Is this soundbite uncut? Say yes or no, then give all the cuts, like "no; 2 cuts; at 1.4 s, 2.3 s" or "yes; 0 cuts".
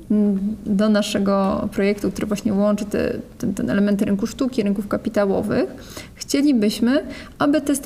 yes; 0 cuts